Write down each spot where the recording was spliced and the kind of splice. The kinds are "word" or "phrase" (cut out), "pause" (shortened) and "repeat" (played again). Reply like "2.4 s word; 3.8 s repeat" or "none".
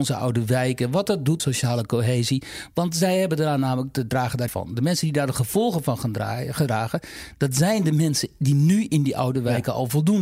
1.4 s phrase; 4.5 s phrase

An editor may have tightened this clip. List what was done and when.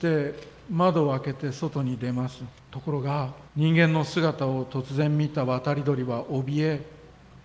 2.6 s pause; 3.5 s pause

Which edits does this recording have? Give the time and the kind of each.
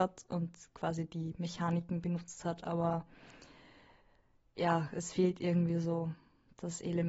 none

